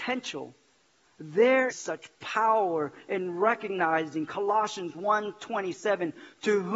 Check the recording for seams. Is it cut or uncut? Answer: cut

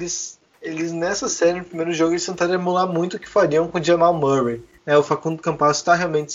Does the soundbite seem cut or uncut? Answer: cut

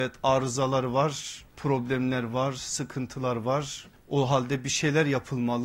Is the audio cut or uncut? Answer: cut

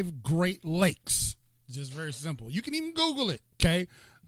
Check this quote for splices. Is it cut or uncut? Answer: uncut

